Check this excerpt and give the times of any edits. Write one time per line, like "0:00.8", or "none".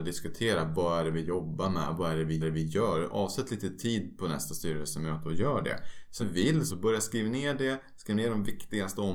0:02.4
0:06.2
0:06.7